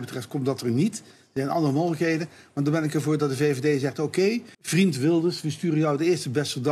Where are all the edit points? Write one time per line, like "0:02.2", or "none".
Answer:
0:04.5